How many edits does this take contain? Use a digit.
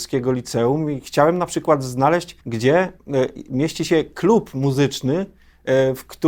1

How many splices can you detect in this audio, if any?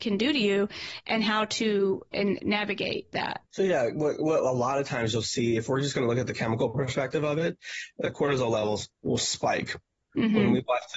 1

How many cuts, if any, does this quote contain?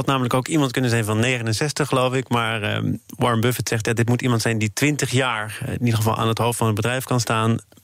0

